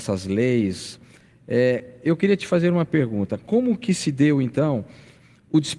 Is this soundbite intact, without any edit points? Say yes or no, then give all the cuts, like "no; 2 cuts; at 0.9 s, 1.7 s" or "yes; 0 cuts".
yes; 0 cuts